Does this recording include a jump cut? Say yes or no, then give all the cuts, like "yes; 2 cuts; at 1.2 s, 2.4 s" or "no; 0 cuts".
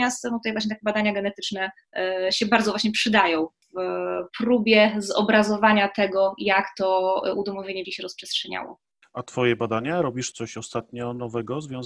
yes; 3 cuts; at 4.3 s, 7.8 s, 10.3 s